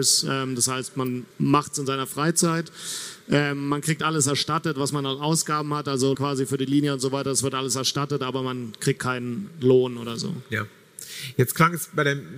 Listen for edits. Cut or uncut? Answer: cut